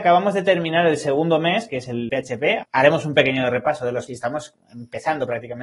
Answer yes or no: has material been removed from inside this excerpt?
yes